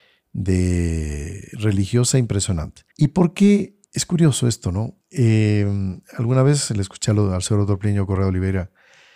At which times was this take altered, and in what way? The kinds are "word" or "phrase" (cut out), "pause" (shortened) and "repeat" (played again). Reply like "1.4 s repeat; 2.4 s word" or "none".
2.9 s pause; 3.9 s pause; 5.0 s pause